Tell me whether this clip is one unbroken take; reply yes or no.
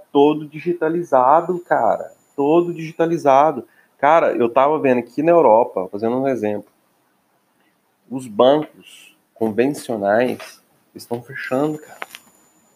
yes